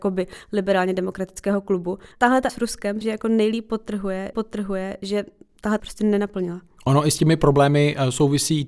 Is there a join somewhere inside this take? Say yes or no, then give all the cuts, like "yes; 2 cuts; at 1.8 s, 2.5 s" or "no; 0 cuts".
yes; 5 cuts; at 2.1 s, 2.5 s, 3.0 s, 4.3 s, 5.8 s